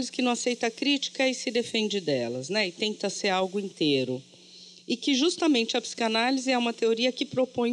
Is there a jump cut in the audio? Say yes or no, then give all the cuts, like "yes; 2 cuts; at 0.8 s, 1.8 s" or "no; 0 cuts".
no; 0 cuts